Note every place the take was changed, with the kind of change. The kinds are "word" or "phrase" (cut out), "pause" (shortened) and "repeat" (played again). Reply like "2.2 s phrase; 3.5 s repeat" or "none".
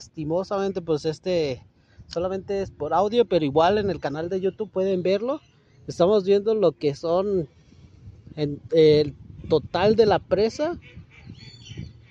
none